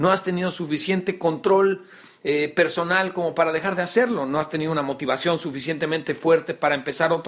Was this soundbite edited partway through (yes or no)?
no